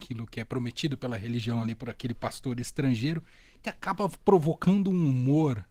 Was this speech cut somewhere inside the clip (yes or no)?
no